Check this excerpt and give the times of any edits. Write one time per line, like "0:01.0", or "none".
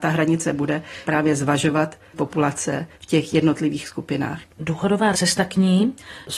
0:01.1
0:02.1
0:02.9
0:05.1